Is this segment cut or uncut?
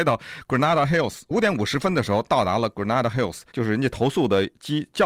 cut